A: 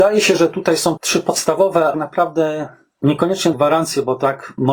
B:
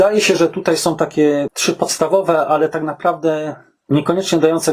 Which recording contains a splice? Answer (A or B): A